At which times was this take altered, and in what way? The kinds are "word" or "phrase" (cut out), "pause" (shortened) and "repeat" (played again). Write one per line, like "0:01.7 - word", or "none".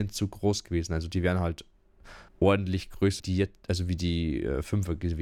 0:02.3 - pause
0:03.2 - word